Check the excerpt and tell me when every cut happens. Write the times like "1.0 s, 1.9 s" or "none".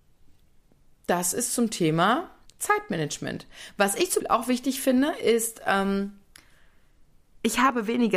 2.5 s, 4.2 s